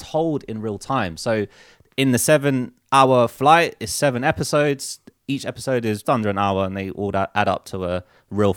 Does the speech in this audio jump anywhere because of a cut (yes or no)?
yes